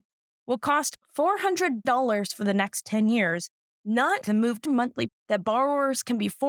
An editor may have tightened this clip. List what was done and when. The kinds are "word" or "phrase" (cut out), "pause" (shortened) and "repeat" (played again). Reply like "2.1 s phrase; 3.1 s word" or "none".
1.8 s word; 4.2 s word; 4.6 s word; 5.1 s word